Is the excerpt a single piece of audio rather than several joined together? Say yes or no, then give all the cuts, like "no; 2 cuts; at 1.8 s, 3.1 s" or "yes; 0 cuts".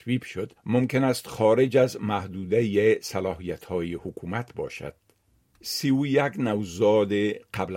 yes; 0 cuts